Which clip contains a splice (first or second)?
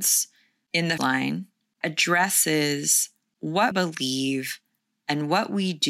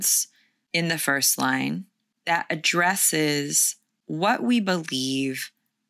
first